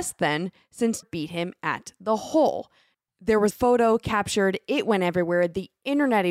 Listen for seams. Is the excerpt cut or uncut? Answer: cut